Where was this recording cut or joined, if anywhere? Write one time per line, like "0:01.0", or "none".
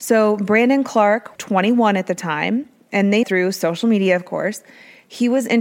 0:01.4
0:03.2